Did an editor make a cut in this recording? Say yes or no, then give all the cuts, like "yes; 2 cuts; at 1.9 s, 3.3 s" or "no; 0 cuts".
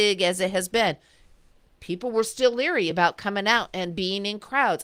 no; 0 cuts